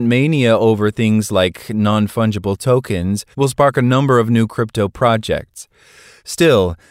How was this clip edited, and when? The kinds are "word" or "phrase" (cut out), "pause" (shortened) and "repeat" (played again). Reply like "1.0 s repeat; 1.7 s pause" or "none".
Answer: 3.3 s pause